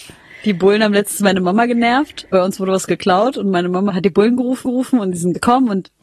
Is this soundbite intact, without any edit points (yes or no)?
no